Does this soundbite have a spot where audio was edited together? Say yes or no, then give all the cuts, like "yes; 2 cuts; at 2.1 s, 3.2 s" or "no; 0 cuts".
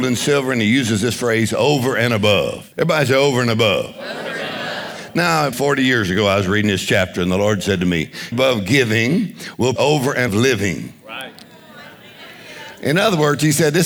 yes; 5 cuts; at 2.7 s, 5.5 s, 8.3 s, 9.8 s, 10.3 s